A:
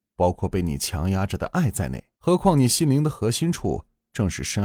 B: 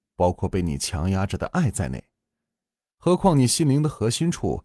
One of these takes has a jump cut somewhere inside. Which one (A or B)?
A